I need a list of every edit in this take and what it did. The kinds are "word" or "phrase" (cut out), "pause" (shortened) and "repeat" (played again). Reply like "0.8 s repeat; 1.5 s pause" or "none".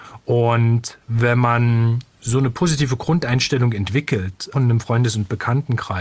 4.5 s word